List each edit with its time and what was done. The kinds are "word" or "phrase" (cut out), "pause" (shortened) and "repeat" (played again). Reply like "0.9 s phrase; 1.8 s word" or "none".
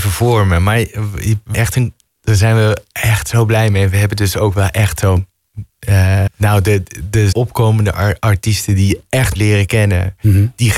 1.5 s word; 6.3 s word; 7.3 s word; 9.4 s word